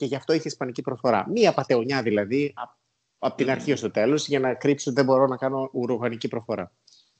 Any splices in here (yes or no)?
no